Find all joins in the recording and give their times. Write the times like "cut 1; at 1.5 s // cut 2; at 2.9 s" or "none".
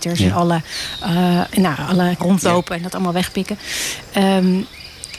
cut 1; at 1.5 s // cut 2; at 2.2 s